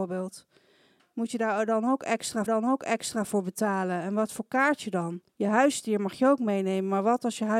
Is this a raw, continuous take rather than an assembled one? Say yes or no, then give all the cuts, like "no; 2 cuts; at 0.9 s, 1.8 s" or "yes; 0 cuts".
no; 2 cuts; at 2.5 s, 5.3 s